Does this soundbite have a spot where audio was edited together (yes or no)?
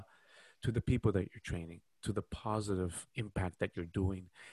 yes